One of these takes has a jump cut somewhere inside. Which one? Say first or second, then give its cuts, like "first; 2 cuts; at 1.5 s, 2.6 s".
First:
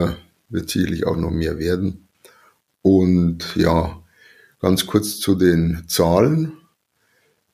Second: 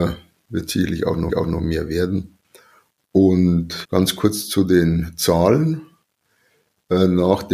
second; 2 cuts; at 1.3 s, 3.8 s